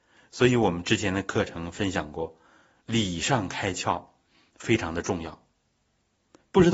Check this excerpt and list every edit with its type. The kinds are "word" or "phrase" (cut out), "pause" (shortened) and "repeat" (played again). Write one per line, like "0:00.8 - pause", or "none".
none